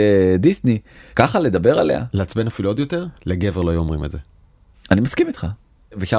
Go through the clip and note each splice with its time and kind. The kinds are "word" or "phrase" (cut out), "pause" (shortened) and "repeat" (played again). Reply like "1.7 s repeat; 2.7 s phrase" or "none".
2.1 s word; 3.2 s pause